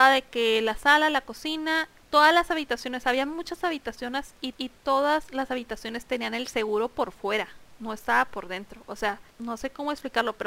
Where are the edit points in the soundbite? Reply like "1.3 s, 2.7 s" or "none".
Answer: 4.5 s, 9.3 s